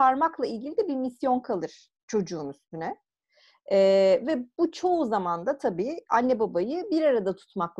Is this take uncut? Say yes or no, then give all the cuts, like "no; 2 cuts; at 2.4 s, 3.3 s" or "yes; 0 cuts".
yes; 0 cuts